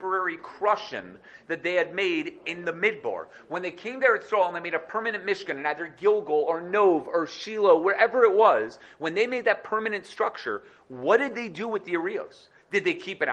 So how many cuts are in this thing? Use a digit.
0